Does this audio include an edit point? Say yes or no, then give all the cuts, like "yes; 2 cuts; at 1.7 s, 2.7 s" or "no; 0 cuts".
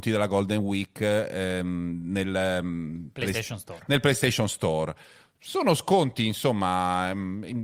no; 0 cuts